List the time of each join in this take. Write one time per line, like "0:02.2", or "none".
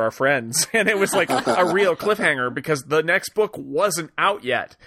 none